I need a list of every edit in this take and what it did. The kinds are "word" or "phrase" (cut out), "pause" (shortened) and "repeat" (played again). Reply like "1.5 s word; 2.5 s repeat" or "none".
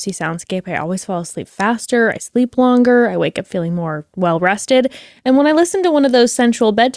none

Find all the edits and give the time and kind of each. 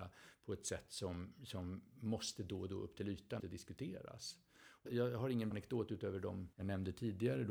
3.4 s word; 4.9 s word; 5.5 s word; 6.5 s pause

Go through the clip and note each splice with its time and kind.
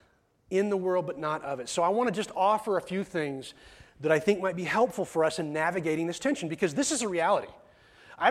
none

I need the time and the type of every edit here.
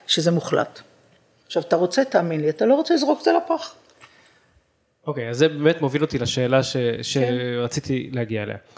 none

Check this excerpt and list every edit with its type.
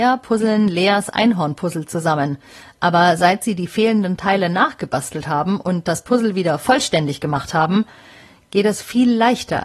none

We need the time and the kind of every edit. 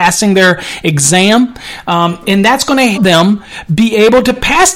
2.9 s word

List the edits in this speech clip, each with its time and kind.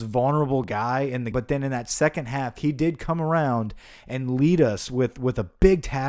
1.3 s word

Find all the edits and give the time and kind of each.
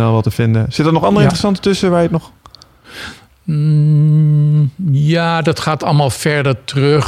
none

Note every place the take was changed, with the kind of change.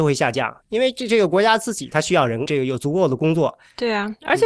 2.5 s word

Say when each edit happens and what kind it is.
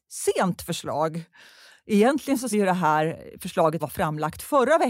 2.5 s word; 3.8 s word

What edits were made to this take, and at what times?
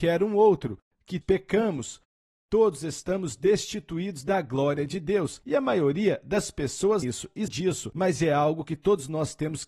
1.2 s word; 7.0 s word; 7.5 s word

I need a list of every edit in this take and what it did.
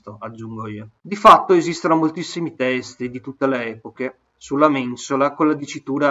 1.0 s pause

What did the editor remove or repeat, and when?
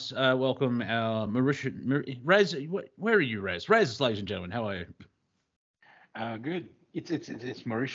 none

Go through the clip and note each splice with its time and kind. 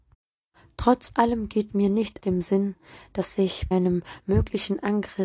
1.7 s word; 2.2 s word; 3.7 s word

